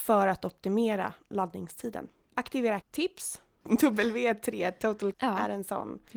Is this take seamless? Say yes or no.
no